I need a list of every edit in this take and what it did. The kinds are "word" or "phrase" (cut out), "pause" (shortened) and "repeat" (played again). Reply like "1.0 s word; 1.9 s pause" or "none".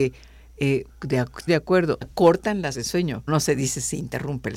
1.5 s word; 2.0 s word; 2.7 s word; 3.3 s word